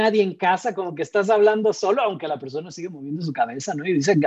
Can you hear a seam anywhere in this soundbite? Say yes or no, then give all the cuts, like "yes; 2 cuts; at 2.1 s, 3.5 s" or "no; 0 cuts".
no; 0 cuts